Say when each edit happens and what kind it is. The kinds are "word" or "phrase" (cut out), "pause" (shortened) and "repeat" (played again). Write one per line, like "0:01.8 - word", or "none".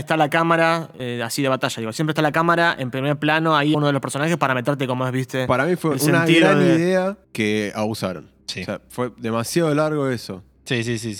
0:03.7 - phrase
0:07.2 - pause
0:08.4 - pause